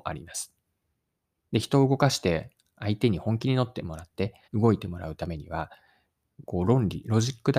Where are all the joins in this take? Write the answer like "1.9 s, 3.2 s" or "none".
4.4 s